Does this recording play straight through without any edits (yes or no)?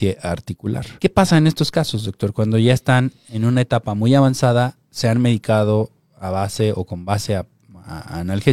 no